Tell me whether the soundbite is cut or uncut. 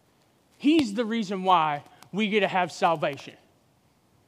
uncut